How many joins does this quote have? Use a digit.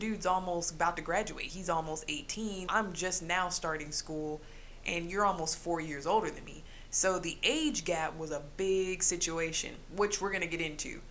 1